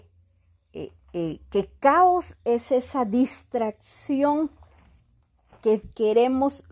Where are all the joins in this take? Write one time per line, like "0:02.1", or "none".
none